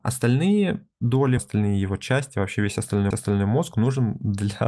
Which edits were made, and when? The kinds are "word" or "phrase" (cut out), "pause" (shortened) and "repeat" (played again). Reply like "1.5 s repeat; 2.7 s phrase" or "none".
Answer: 1.4 s word; 3.1 s repeat